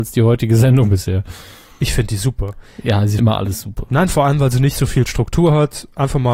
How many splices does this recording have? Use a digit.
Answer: 1